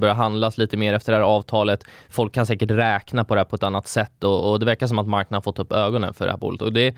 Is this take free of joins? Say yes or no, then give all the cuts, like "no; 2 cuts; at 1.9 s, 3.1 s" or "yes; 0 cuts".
yes; 0 cuts